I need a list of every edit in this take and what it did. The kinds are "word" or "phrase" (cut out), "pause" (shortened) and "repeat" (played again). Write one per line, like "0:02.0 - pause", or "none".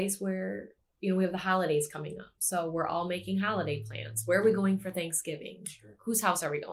none